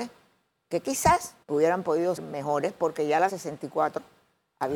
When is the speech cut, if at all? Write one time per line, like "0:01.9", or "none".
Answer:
0:01.4
0:02.2
0:03.3